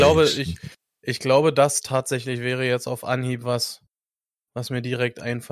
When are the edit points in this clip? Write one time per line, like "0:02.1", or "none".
none